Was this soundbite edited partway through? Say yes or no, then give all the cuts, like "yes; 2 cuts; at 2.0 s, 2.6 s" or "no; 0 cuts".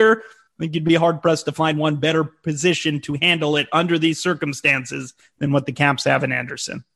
no; 0 cuts